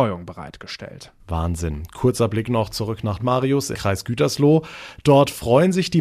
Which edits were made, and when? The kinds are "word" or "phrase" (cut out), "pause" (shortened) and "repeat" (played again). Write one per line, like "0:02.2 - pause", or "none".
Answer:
0:01.2 - pause
0:03.2 - word
0:03.7 - word